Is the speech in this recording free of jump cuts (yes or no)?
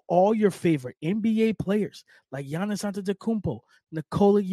yes